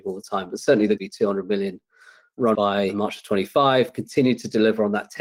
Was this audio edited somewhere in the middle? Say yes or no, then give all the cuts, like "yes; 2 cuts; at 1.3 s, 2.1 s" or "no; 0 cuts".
yes; 2 cuts; at 1.0 s, 2.5 s